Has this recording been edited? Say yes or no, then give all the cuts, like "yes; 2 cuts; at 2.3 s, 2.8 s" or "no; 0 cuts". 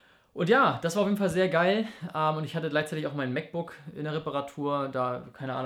no; 0 cuts